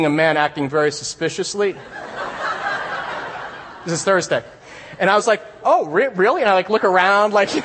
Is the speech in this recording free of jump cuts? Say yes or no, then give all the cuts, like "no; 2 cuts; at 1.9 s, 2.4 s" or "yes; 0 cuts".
yes; 0 cuts